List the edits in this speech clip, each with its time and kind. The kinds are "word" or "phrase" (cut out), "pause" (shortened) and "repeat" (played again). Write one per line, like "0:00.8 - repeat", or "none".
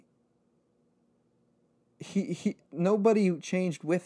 0:02.6 - pause